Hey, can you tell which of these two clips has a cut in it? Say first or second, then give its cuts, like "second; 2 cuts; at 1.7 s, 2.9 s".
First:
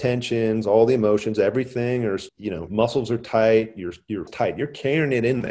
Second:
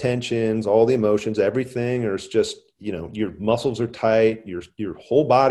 first; 3 cuts; at 2.3 s, 2.7 s, 4.3 s